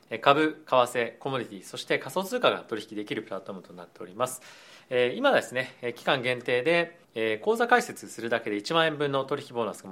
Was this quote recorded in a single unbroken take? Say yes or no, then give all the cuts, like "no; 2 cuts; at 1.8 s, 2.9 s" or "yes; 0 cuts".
no; 1 cut; at 7.0 s